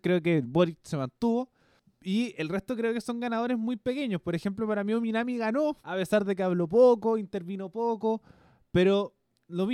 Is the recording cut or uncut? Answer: cut